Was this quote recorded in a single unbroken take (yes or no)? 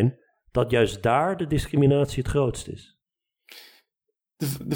yes